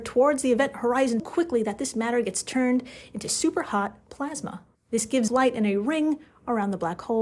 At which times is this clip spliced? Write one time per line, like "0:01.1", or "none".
0:01.2
0:04.7
0:05.3